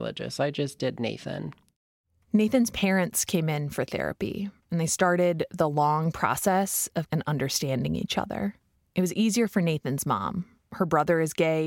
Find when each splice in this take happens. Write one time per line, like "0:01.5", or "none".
0:04.6
0:07.1
0:08.7